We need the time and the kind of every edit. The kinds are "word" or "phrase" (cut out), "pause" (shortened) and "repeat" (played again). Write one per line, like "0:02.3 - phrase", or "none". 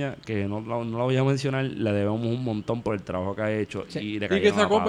none